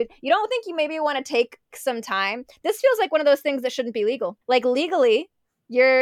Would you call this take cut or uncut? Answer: cut